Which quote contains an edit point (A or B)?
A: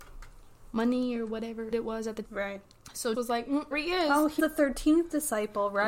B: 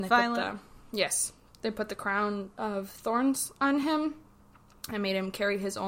A